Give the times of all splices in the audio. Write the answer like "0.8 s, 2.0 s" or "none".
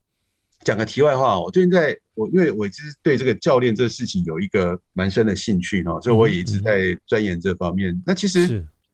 3.0 s, 4.8 s, 7.0 s